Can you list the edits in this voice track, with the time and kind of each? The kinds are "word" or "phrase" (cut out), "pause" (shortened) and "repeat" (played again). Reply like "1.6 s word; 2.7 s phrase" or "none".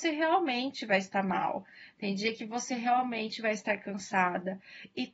none